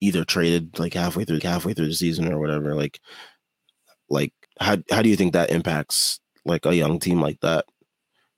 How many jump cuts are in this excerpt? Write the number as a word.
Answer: three